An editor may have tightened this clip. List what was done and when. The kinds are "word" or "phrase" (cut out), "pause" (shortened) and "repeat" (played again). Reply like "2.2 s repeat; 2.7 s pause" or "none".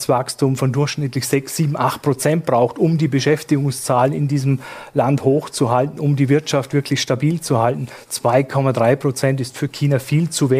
none